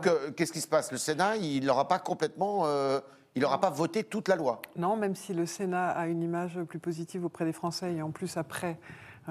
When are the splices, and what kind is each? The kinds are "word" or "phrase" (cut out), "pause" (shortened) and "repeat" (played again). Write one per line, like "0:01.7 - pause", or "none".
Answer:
none